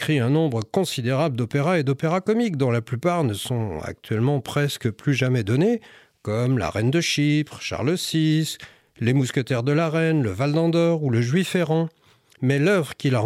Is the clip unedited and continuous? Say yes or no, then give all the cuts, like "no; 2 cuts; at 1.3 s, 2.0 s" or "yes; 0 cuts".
yes; 0 cuts